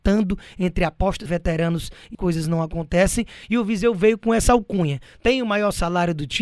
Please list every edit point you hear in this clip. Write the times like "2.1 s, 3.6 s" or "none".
1.3 s, 2.1 s